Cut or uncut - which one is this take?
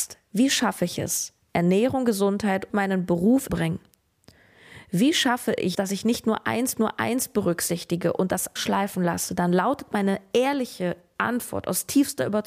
cut